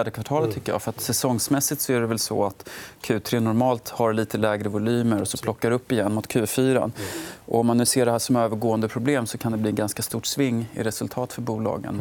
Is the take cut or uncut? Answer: uncut